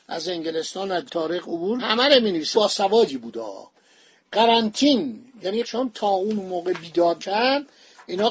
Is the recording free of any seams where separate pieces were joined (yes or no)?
no